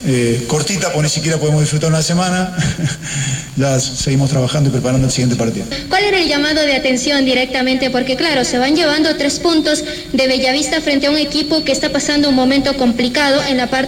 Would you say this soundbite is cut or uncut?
cut